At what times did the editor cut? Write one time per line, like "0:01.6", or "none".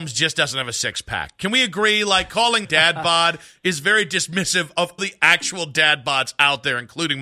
0:02.6
0:05.0